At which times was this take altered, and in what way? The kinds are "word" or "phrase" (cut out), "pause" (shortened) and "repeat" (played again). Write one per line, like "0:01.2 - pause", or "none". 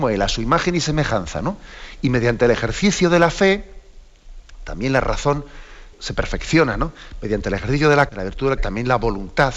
0:05.9 - word
0:08.1 - word
0:08.6 - word